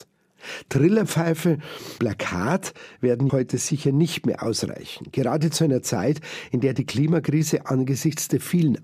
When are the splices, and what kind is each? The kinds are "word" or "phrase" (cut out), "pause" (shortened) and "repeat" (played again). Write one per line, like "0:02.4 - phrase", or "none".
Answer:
0:02.0 - word
0:03.3 - word